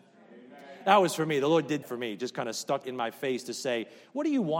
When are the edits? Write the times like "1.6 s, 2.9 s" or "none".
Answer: 1.8 s, 2.8 s